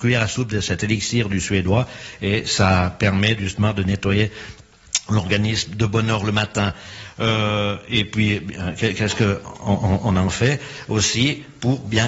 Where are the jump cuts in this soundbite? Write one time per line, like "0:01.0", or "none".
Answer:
none